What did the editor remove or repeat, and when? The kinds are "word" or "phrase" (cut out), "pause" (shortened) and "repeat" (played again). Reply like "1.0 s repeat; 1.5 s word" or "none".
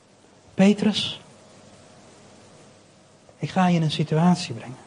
none

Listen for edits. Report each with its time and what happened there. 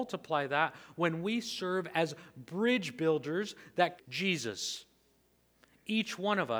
4.0 s phrase

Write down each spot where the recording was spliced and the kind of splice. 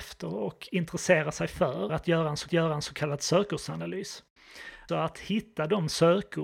1.9 s word; 2.5 s repeat; 4.9 s word

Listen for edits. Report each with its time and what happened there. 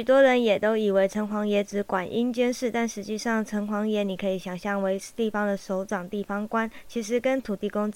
none

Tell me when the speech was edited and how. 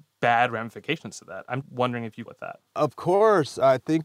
1.6 s word; 2.3 s word; 2.7 s pause

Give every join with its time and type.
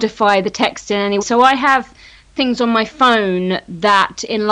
1.2 s word

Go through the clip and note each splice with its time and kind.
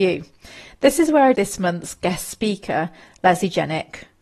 1.3 s word

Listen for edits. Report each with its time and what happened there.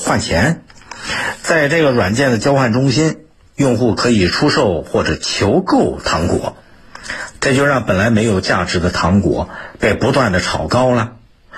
none

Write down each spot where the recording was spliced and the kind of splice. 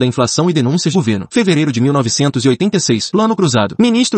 0.9 s phrase

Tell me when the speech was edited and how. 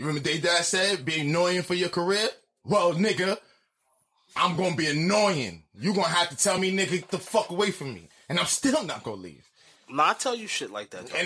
none

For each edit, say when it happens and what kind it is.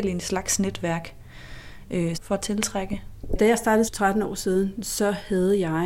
2.1 s phrase; 3.9 s word

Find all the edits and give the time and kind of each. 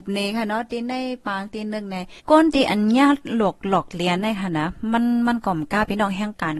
2.2 s pause

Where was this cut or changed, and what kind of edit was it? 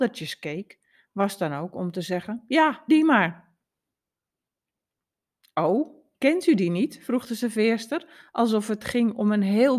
2.9 s word

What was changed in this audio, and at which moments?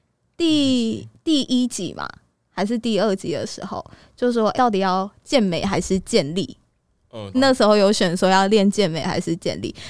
4.5 s word; 7.3 s word

